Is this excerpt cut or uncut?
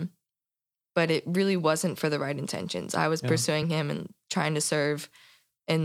uncut